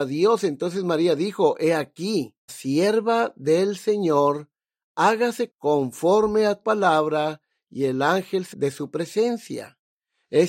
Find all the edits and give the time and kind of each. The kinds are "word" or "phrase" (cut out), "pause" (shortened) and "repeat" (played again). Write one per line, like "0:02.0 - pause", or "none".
0:02.5 - word
0:05.5 - word
0:06.6 - word
0:08.5 - word